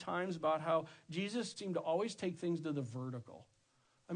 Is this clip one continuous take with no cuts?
no; 1 cut; at 1.6 s

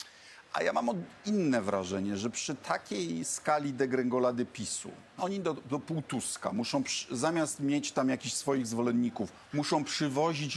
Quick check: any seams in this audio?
yes; 1 cut; at 5.2 s

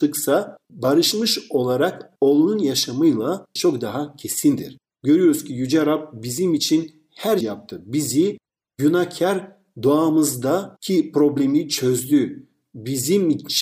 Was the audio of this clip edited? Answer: yes; 2 cuts; at 3.6 s, 7.4 s

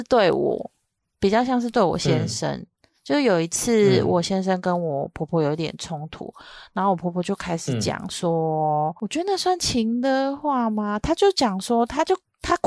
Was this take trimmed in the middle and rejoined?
no; 0 cuts

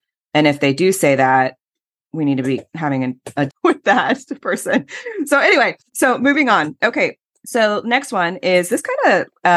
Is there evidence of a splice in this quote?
yes; 4 cuts; at 2.0 s, 2.7 s, 3.5 s, 5.9 s

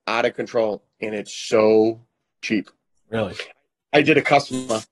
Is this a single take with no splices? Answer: yes; 0 cuts

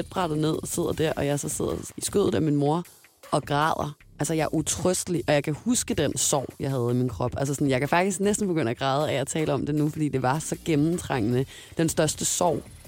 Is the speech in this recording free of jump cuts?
yes; 0 cuts

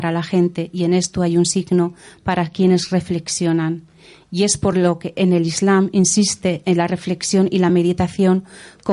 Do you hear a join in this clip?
no; 0 cuts

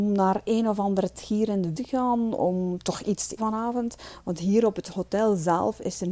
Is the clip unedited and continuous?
no; 3 cuts; at 1.1 s, 1.7 s, 3.4 s

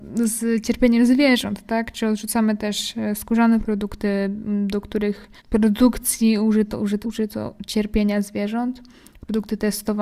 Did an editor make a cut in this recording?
yes; 3 cuts; at 3.6 s, 5.4 s, 7.0 s

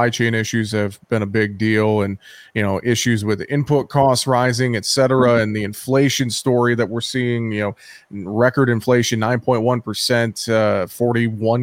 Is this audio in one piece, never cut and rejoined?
yes; 0 cuts

